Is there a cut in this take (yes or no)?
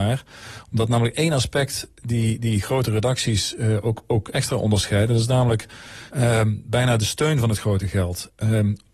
yes